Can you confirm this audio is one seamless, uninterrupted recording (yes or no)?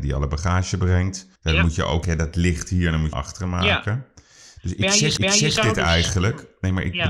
no